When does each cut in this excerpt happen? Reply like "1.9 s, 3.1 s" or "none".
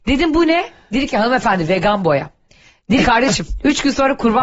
3.0 s